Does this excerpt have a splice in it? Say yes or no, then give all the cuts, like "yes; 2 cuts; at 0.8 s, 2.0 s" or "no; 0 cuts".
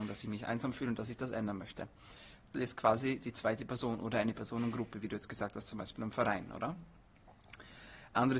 yes; 1 cut; at 2.5 s